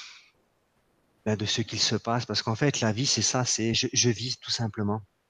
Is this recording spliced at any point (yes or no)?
no